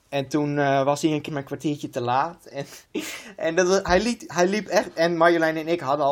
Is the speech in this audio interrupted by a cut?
yes; 2 cuts; at 1.3 s, 2.9 s

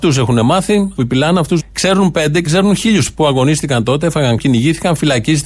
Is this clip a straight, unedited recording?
no; 5 cuts; at 1.0 s, 1.6 s, 2.5 s, 3.1 s, 4.4 s

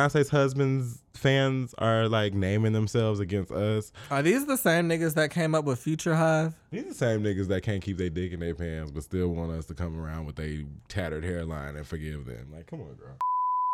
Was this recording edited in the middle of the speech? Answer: no; 0 cuts

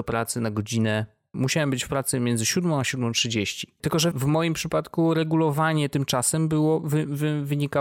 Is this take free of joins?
no; 2 cuts; at 1.3 s, 4.1 s

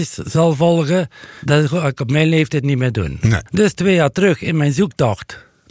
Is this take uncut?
yes; 0 cuts

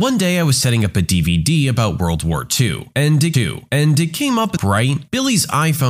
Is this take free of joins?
no; 2 cuts; at 3.3 s, 4.6 s

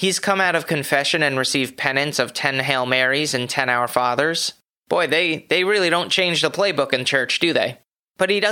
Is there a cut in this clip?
no; 0 cuts

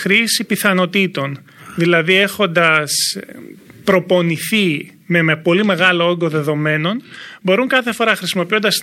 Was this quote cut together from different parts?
no; 0 cuts

